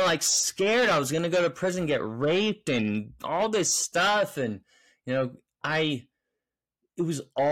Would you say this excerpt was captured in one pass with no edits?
yes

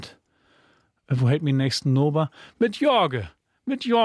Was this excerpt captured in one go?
yes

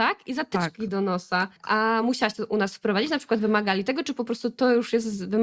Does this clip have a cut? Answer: no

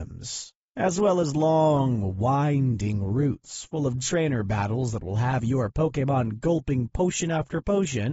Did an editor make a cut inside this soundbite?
no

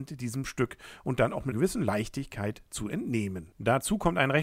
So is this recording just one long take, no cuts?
no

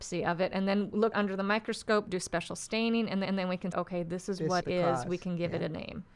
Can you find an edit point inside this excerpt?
yes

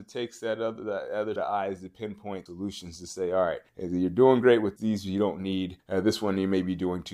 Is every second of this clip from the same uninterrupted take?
no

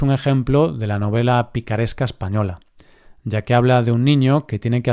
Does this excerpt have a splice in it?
no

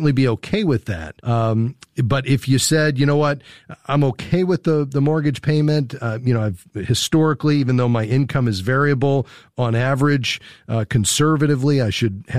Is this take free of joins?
no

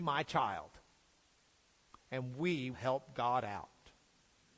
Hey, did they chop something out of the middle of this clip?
yes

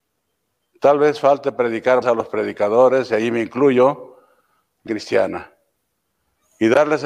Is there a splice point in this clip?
yes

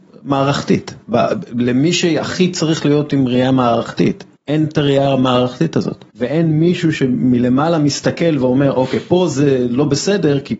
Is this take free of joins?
no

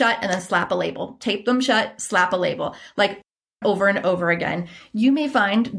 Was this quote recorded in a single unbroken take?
yes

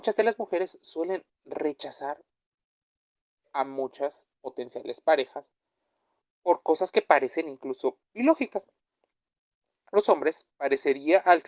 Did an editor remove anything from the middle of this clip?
no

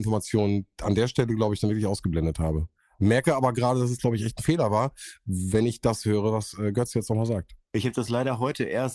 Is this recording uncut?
yes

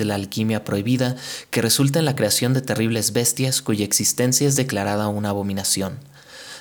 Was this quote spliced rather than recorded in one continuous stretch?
no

